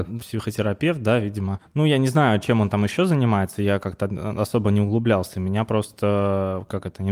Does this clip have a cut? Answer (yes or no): no